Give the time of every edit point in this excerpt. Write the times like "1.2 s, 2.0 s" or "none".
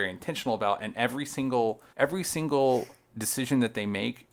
1.9 s